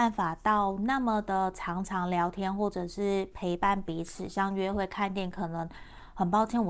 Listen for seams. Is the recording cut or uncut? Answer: uncut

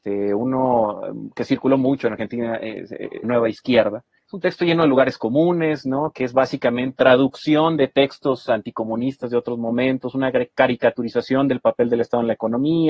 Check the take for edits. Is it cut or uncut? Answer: cut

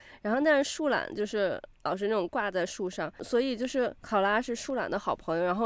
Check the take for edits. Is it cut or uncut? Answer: cut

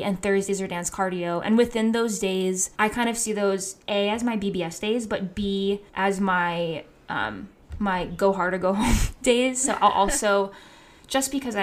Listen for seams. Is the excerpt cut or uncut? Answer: cut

